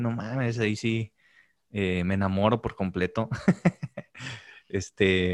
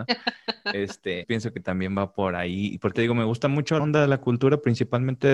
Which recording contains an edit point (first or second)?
second